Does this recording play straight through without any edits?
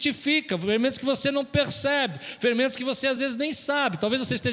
yes; 0 cuts

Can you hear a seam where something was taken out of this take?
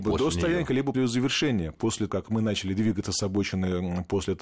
yes; 2 cuts; at 0.9 s, 2.1 s

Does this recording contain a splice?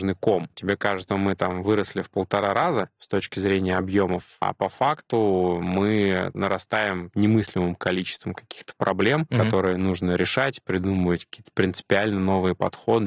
yes; 1 cut; at 1.1 s

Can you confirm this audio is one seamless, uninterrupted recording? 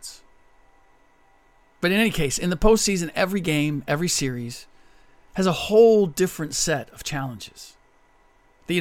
yes; 0 cuts

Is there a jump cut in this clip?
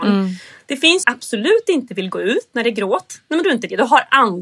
yes; 2 cuts; at 1.0 s, 3.4 s

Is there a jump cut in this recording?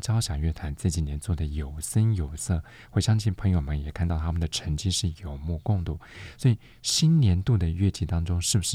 no; 0 cuts

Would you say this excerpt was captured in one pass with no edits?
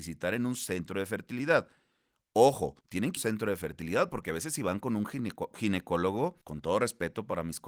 no; 3 cuts; at 2.8 s, 3.2 s, 6.4 s

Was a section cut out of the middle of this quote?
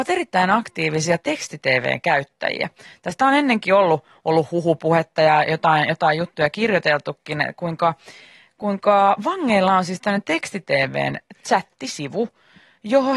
no; 0 cuts

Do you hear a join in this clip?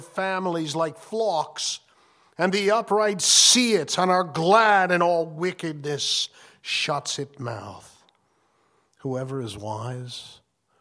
no; 0 cuts

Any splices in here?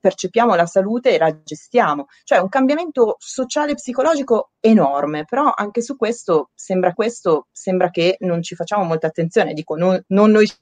yes; 1 cut; at 6.9 s

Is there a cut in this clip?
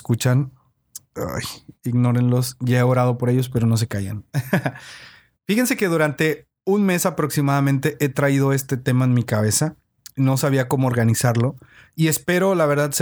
no; 0 cuts

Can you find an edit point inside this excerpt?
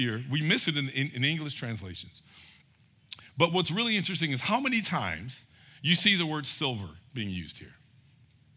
no; 0 cuts

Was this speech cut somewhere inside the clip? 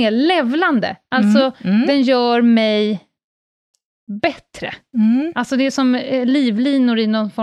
no; 0 cuts

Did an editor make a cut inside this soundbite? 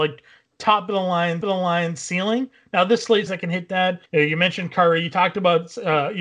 yes; 3 cuts; at 1.4 s, 3.3 s, 4.1 s

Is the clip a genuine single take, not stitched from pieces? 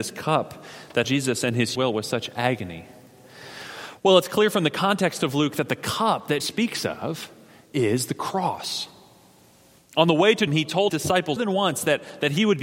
no; 6 cuts; at 1.0 s, 1.7 s, 6.4 s, 10.5 s, 10.9 s, 11.4 s

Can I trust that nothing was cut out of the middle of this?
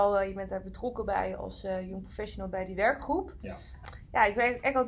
yes; 0 cuts

